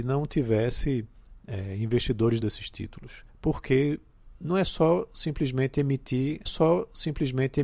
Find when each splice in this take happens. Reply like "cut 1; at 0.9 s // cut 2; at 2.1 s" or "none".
cut 1; at 2.4 s // cut 2; at 3.3 s // cut 3; at 6.5 s